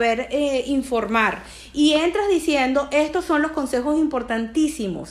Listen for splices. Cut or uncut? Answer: uncut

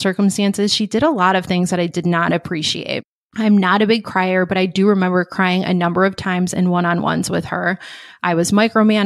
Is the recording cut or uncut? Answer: cut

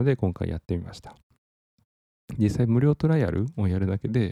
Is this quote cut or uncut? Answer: uncut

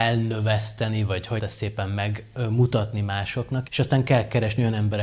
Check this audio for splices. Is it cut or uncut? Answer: cut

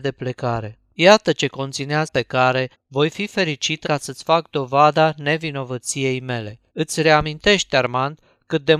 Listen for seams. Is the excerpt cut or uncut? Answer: cut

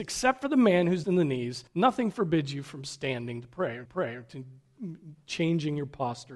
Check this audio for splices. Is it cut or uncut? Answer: cut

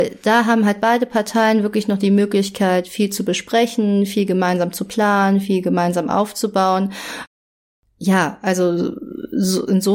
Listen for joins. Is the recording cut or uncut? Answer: uncut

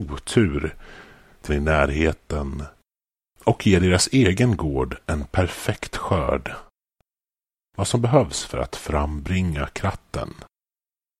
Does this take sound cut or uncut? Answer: cut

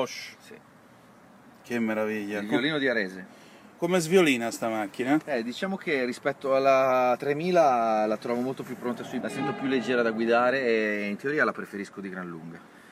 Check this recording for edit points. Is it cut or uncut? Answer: cut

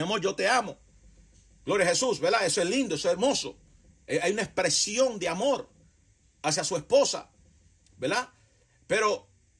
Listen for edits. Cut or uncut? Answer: uncut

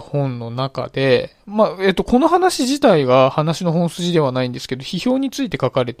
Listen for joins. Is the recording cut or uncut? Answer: uncut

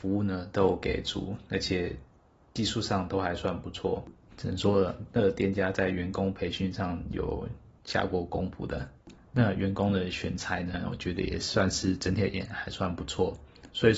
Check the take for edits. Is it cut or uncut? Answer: uncut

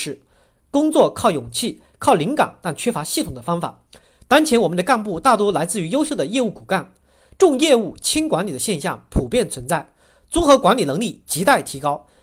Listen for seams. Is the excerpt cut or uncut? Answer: uncut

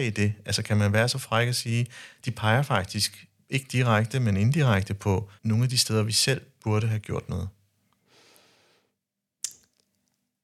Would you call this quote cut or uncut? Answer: cut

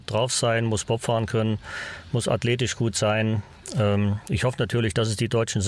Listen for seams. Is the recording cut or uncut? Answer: uncut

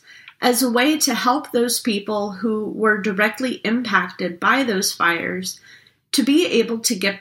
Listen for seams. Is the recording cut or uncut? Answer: uncut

